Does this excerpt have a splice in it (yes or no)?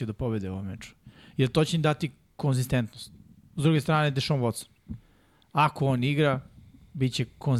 no